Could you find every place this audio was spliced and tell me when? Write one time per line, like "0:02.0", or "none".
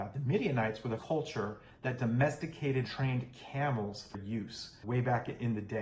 0:01.0
0:02.9
0:04.1
0:04.8